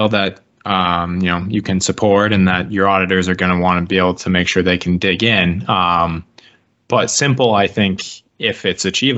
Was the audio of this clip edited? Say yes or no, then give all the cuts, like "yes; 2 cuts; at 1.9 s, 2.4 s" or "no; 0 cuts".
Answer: no; 0 cuts